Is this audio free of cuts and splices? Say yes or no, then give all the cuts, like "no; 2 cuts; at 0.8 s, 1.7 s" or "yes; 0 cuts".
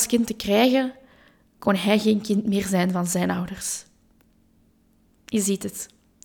yes; 0 cuts